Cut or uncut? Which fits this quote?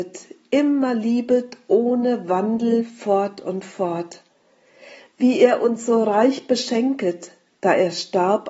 uncut